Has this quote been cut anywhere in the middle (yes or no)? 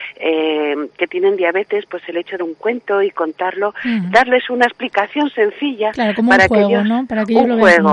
yes